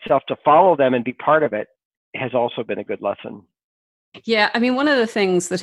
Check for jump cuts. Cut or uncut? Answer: uncut